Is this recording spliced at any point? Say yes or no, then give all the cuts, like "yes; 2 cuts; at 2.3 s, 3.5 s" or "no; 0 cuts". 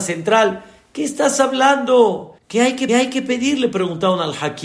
yes; 2 cuts; at 2.4 s, 2.9 s